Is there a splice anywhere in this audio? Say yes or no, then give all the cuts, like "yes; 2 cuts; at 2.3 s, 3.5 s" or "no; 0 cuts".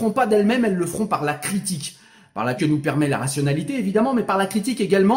yes; 1 cut; at 2.6 s